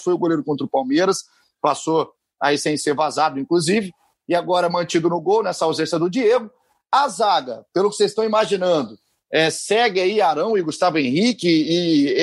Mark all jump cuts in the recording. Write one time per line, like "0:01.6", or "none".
none